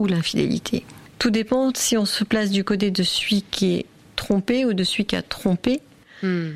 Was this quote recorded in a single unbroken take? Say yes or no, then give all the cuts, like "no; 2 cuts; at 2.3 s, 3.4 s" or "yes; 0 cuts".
yes; 0 cuts